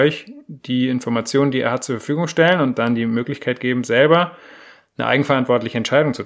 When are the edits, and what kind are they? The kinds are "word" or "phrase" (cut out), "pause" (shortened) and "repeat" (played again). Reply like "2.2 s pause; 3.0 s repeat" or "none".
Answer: none